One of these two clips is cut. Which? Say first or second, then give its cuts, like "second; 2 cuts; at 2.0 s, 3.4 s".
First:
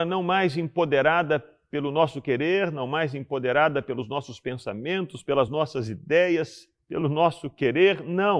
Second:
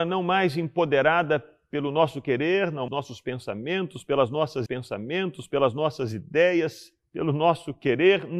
second; 2 cuts; at 2.9 s, 4.7 s